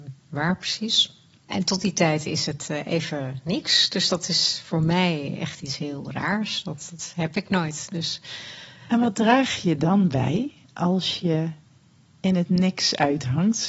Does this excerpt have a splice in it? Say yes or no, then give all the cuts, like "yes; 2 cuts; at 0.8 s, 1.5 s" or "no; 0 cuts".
no; 0 cuts